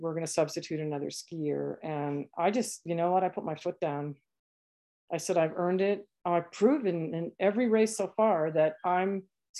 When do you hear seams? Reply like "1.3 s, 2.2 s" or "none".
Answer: none